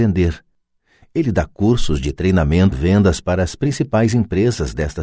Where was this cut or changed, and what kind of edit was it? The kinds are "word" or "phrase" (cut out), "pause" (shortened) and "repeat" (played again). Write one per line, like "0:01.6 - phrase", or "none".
0:02.7 - word